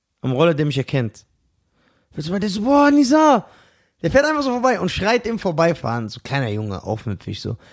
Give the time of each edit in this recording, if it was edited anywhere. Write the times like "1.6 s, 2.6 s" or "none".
none

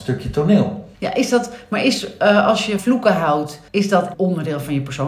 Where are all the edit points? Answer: 0.9 s, 2.8 s, 3.7 s, 4.1 s

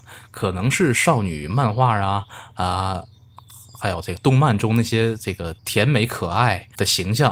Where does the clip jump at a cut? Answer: 5.6 s

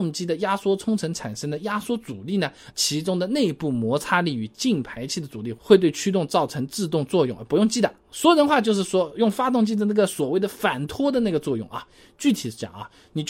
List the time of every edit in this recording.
2.7 s

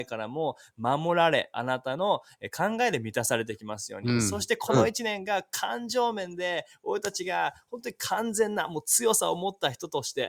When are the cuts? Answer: none

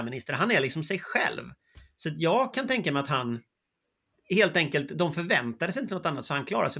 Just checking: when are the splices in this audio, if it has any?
none

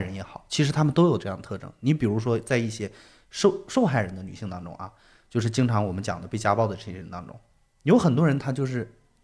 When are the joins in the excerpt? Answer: none

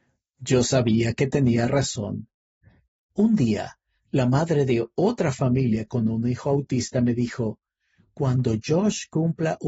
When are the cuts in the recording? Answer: none

